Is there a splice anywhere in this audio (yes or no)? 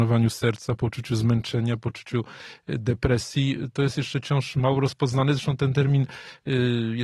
no